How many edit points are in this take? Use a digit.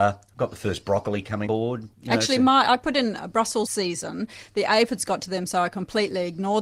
3